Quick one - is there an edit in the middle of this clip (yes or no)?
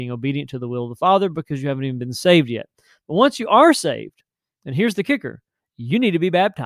no